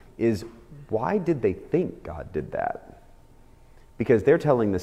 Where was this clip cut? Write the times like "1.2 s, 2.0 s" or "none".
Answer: none